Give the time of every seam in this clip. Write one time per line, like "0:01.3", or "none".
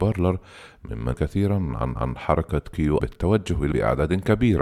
0:01.1
0:02.0
0:03.0
0:03.7